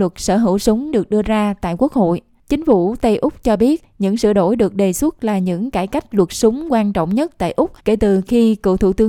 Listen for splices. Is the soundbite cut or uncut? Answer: cut